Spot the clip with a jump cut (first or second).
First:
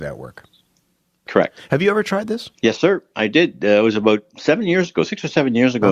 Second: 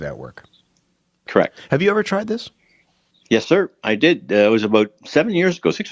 first